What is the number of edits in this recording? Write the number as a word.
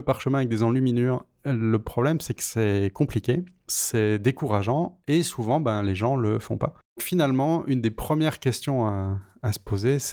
zero